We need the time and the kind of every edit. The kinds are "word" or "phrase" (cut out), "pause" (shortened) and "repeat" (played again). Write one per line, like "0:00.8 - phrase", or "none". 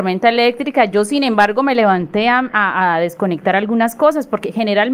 none